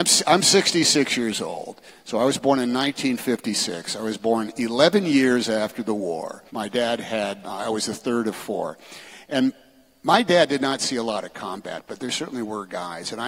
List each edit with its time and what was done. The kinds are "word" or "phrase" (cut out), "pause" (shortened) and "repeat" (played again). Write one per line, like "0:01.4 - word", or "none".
0:06.5 - pause
0:07.4 - word